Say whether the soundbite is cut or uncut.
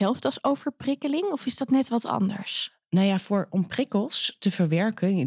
uncut